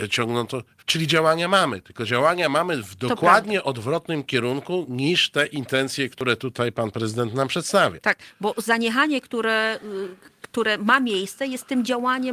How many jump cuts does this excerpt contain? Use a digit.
0